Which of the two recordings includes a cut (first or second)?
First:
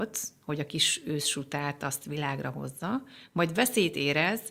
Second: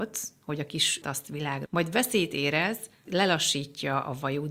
second